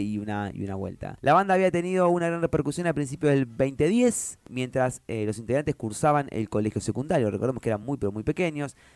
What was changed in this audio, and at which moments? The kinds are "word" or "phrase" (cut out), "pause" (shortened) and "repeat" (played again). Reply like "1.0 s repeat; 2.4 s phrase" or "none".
none